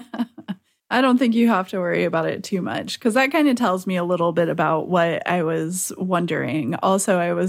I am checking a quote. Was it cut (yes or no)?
no